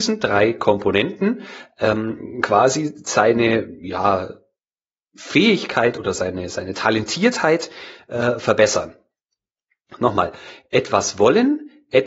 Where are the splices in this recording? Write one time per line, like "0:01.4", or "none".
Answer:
none